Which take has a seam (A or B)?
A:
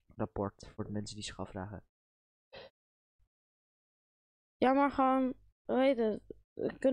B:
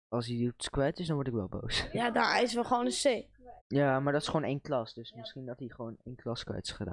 B